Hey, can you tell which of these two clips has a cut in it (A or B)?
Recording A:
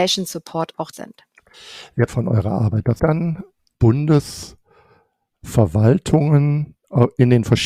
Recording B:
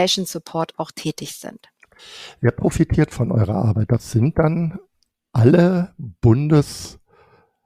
A